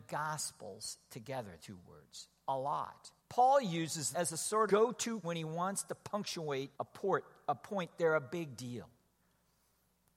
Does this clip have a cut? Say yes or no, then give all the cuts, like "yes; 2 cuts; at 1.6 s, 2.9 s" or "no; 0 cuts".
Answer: yes; 6 cuts; at 1.6 s, 3.2 s, 4.1 s, 4.7 s, 5.2 s, 6.7 s